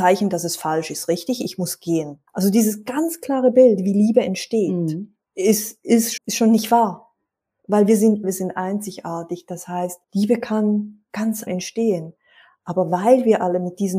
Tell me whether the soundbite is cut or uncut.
cut